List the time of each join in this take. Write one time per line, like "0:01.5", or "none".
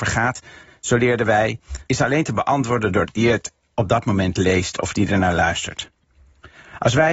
0:01.9
0:03.0